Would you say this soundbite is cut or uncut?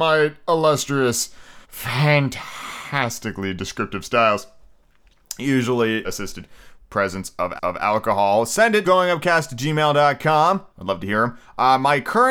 cut